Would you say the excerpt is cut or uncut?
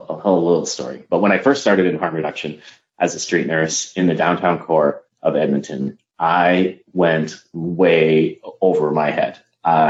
uncut